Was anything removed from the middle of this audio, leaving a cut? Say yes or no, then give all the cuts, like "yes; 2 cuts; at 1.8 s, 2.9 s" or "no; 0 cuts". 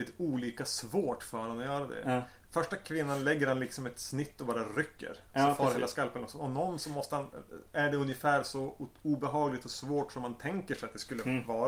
no; 0 cuts